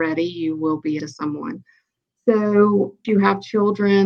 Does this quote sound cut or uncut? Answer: cut